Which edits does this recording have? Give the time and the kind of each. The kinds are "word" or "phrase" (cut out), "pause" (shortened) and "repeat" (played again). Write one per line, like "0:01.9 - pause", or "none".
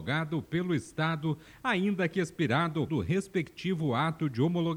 0:02.9 - word